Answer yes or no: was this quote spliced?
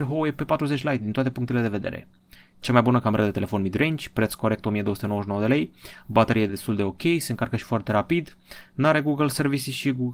no